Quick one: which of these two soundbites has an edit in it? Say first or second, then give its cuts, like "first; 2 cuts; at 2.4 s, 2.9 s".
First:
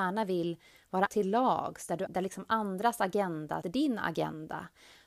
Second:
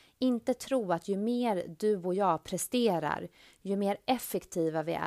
first; 3 cuts; at 1.1 s, 2.1 s, 3.6 s